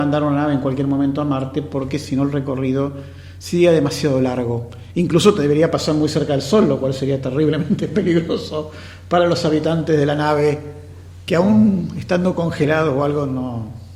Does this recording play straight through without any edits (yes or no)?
yes